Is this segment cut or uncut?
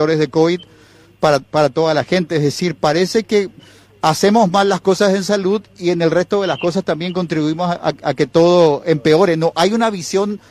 uncut